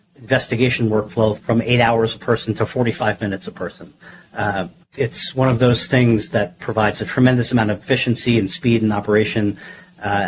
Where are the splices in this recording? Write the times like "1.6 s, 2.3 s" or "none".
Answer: 1.4 s, 4.8 s